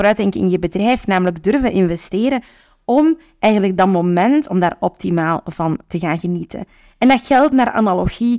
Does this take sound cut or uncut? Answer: uncut